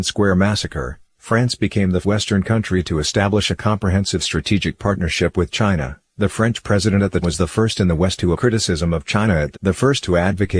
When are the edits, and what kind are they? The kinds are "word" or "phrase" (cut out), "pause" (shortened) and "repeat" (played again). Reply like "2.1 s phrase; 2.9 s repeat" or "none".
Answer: 2.0 s word; 6.1 s pause; 7.2 s word; 8.3 s word; 9.5 s phrase

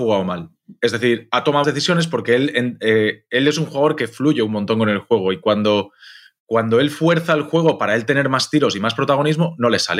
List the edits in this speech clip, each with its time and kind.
1.6 s word

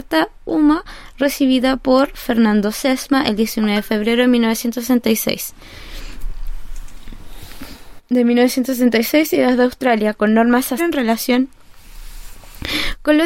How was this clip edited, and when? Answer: 10.8 s word

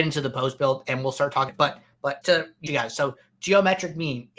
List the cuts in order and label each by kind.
1.5 s word; 2.2 s word; 2.7 s phrase

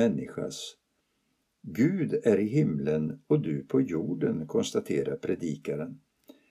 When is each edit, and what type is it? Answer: none

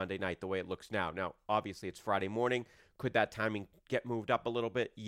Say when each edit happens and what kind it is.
none

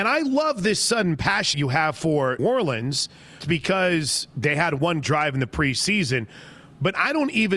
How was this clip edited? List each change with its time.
1.5 s word; 2.4 s word; 3.4 s word; 5.0 s word

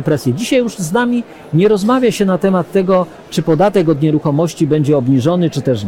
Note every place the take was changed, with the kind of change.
none

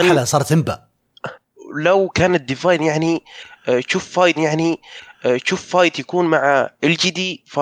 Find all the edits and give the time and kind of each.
4.3 s repeat

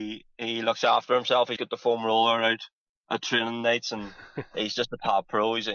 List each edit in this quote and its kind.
1.6 s word

